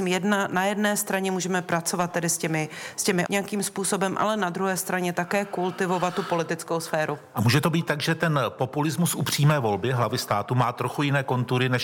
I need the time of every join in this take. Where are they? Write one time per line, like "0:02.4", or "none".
0:03.3